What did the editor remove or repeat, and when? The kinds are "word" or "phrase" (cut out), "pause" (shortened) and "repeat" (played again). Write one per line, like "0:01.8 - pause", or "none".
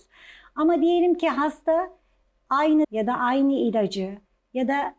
0:02.8 - word